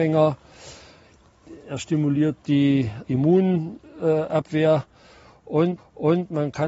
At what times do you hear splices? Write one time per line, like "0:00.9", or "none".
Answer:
0:03.0
0:05.8